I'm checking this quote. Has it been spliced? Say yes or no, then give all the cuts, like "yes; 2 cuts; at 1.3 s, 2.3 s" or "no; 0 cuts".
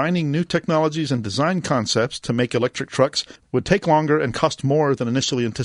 no; 0 cuts